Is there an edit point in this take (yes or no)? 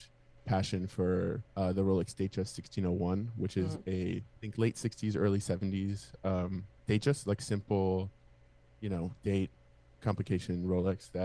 yes